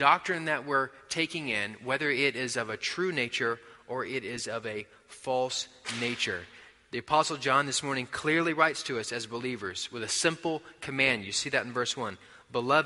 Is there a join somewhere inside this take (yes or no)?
no